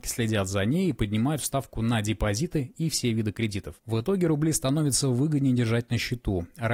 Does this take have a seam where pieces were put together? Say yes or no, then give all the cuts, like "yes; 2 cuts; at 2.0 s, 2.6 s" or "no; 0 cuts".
yes; 1 cut; at 3.8 s